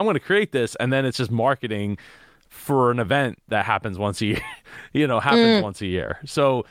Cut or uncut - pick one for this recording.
uncut